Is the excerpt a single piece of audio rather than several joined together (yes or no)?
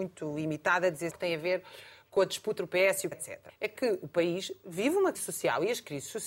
no